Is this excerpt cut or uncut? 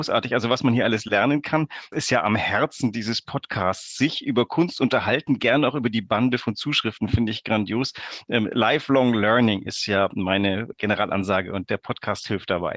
cut